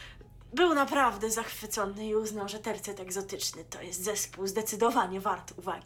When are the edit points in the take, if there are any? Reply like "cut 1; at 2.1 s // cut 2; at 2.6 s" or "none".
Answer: none